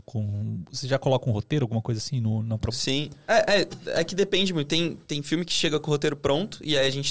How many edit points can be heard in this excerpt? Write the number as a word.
zero